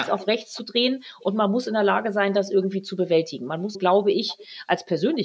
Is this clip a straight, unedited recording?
no; 1 cut; at 3.7 s

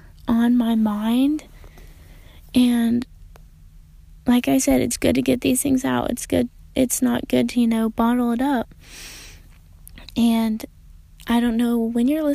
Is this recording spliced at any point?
no; 0 cuts

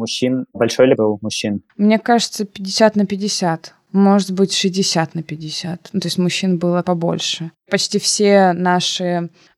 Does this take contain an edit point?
yes; 3 cuts; at 1.0 s, 1.7 s, 6.8 s

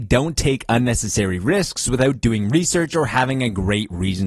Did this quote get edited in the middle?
no; 0 cuts

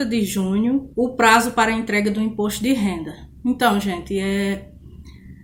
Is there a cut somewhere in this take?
yes; 1 cut; at 0.9 s

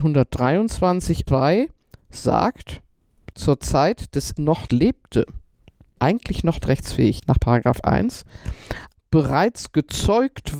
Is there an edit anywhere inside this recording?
yes; 8 cuts; at 1.3 s, 3.3 s, 4.4 s, 4.7 s, 6.0 s, 6.6 s, 7.2 s, 8.9 s

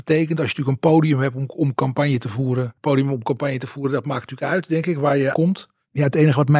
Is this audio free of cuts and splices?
no; 1 cut; at 5.3 s

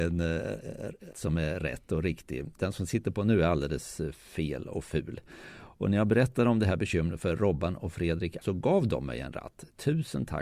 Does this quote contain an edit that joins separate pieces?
yes; 2 cuts; at 1.1 s, 8.4 s

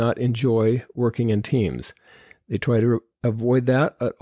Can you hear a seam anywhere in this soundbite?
no; 0 cuts

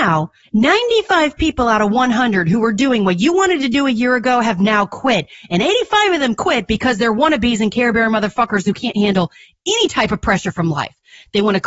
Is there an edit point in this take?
no; 0 cuts

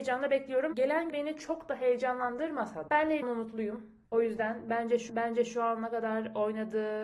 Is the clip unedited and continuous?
no; 5 cuts; at 1.1 s, 2.9 s, 3.2 s, 4.0 s, 5.1 s

